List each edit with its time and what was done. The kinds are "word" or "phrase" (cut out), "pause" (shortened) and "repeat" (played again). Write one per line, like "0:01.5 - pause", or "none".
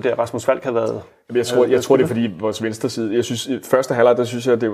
none